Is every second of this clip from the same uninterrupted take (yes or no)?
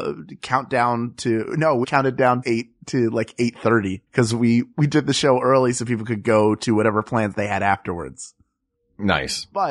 no